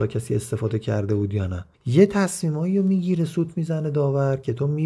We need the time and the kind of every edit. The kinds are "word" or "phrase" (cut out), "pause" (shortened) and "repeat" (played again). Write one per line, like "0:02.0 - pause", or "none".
0:01.7 - pause